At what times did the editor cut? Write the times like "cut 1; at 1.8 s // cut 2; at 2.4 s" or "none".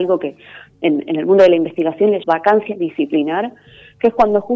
cut 1; at 2.2 s